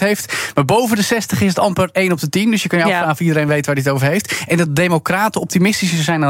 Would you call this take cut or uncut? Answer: uncut